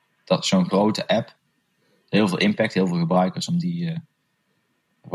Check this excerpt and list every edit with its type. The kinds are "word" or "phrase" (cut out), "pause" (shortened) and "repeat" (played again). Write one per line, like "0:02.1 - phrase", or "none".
none